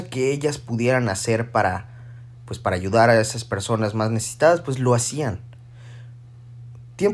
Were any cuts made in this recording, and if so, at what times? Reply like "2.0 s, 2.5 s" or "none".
2.3 s